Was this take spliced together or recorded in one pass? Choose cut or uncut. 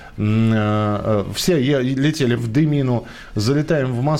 cut